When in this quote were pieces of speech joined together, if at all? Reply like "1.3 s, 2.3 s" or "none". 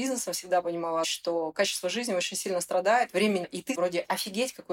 1.0 s, 3.4 s, 3.7 s